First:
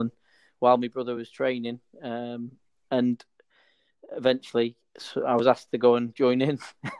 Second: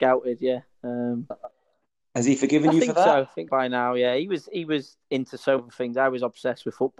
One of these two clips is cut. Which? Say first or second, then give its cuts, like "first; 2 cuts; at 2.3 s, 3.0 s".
second; 3 cuts; at 1.3 s, 3.5 s, 5.6 s